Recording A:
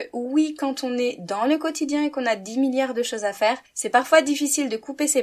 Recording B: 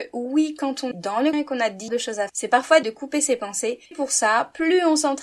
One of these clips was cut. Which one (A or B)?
B